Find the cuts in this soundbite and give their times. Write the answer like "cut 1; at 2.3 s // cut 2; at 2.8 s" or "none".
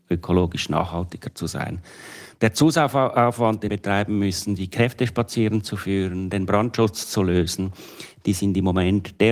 cut 1; at 3.7 s